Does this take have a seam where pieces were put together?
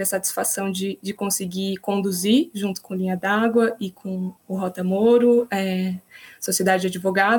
yes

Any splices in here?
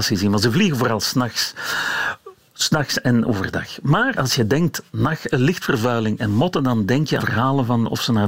yes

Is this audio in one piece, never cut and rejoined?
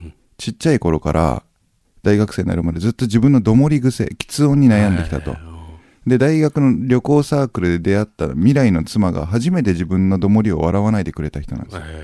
yes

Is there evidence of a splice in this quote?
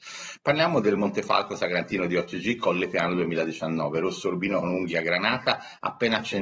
no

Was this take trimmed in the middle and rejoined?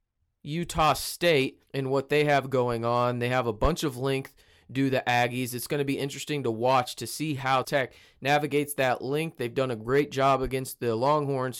yes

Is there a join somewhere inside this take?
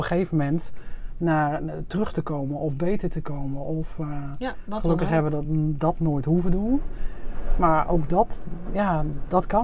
no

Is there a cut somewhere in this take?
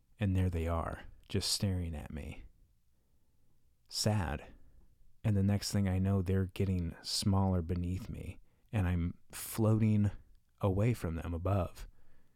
yes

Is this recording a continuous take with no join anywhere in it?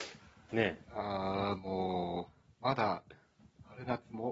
yes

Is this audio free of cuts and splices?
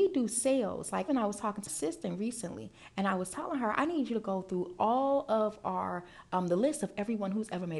no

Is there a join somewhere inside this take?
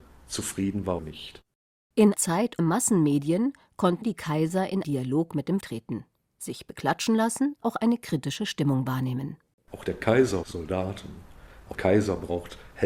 yes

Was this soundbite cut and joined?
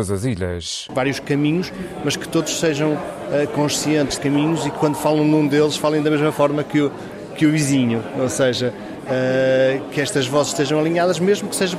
yes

